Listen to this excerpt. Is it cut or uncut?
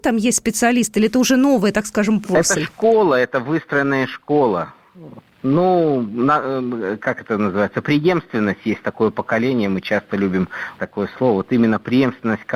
cut